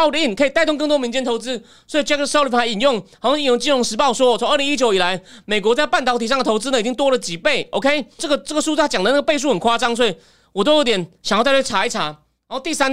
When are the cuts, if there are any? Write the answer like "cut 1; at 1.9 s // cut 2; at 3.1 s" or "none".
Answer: cut 1; at 8.2 s